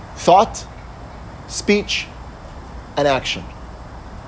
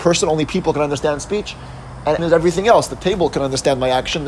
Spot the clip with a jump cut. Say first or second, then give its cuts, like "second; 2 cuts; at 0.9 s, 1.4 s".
second; 1 cut; at 2.2 s